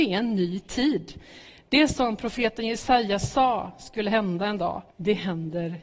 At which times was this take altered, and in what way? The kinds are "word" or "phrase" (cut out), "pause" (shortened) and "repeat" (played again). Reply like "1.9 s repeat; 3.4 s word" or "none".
4.9 s pause